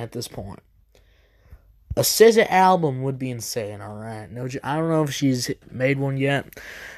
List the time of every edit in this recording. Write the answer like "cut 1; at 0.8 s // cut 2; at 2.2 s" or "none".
none